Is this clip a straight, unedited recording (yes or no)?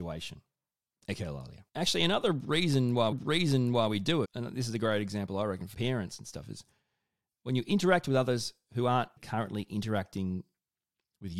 no